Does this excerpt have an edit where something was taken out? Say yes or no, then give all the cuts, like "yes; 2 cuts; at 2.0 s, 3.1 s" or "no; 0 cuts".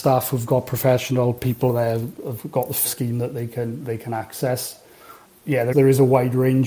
yes; 2 cuts; at 2.8 s, 5.7 s